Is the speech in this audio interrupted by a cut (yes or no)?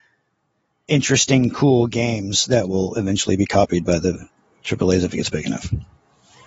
no